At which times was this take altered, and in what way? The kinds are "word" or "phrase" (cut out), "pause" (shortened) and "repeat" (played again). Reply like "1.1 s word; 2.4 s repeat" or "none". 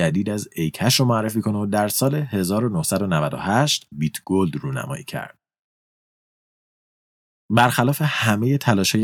3.9 s word